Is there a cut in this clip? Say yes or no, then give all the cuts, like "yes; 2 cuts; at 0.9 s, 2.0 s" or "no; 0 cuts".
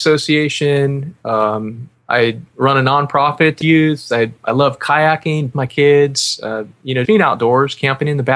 yes; 3 cuts; at 3.6 s, 5.5 s, 7.0 s